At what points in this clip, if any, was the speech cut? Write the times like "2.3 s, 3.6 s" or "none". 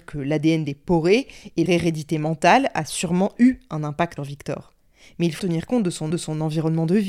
1.7 s, 4.2 s, 5.4 s, 6.1 s